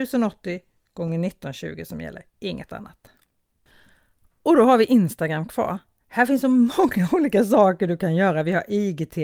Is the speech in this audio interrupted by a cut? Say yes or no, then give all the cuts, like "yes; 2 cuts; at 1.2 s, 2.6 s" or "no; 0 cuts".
no; 0 cuts